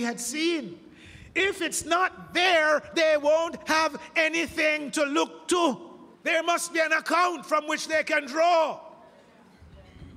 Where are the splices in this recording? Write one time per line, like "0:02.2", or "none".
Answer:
0:06.1